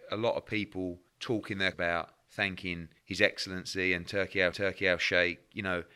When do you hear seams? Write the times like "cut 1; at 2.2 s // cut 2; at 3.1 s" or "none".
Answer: cut 1; at 1.1 s // cut 2; at 1.7 s // cut 3; at 3.0 s // cut 4; at 4.5 s